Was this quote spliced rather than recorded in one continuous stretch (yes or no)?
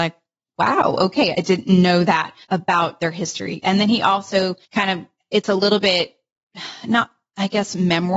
yes